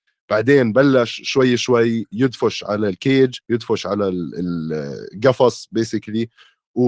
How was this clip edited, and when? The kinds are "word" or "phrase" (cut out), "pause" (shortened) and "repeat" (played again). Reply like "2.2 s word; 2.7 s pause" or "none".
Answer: 3.4 s pause